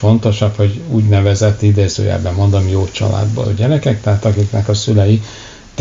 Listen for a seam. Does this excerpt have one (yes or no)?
yes